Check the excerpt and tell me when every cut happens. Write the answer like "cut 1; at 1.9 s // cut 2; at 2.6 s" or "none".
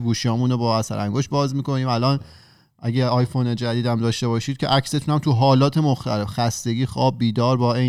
none

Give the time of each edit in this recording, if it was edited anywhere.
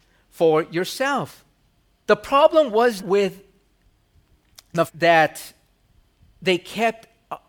cut 1; at 1.7 s // cut 2; at 3.0 s // cut 3; at 4.9 s

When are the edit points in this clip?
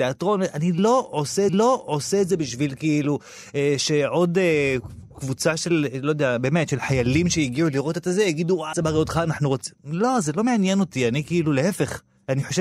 cut 1; at 1.5 s // cut 2; at 8.7 s

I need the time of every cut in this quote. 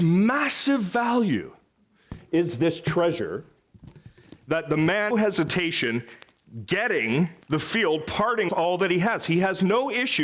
cut 1; at 5.1 s // cut 2; at 7.4 s // cut 3; at 8.5 s

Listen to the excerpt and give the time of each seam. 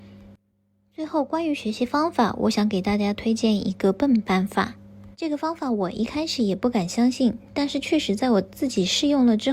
cut 1; at 5.1 s

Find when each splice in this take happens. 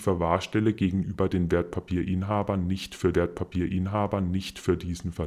cut 1; at 3.1 s

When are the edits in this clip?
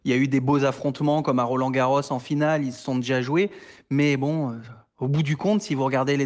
none

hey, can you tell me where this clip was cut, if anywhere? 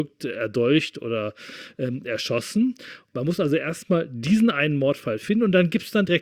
none

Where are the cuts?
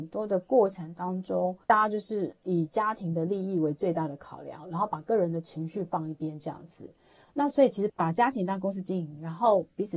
cut 1; at 1.6 s

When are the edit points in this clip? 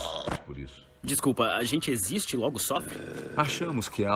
none

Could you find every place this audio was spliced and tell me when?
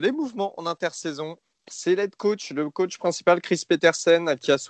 cut 1; at 1.7 s

